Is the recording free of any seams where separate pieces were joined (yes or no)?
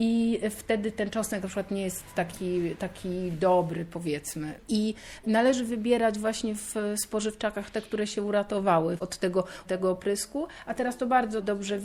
yes